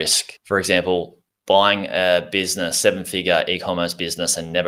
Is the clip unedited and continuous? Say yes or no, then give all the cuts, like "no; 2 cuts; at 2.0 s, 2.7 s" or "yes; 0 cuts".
yes; 0 cuts